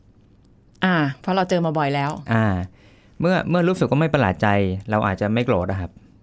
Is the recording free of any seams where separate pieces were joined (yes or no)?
yes